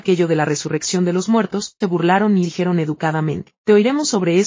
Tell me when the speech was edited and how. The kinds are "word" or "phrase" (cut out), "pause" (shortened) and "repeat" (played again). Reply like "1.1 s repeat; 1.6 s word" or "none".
1.8 s word; 2.4 s word